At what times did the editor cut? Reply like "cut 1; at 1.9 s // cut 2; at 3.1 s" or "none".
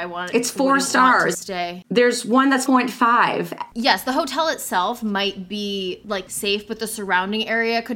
cut 1; at 2.7 s // cut 2; at 6.3 s